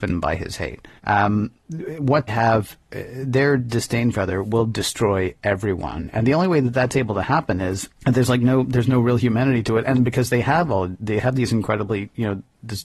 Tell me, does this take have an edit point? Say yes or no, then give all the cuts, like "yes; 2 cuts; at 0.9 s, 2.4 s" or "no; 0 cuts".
yes; 4 cuts; at 1.0 s, 2.3 s, 4.1 s, 7.9 s